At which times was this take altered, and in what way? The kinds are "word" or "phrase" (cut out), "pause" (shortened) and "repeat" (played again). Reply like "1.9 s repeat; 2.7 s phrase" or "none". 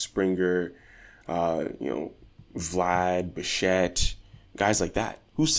2.5 s pause; 4.5 s pause